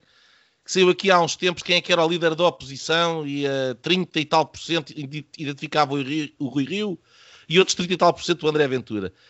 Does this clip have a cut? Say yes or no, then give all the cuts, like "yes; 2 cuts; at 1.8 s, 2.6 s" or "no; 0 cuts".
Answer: no; 0 cuts